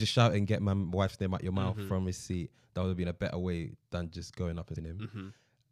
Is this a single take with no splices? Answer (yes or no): no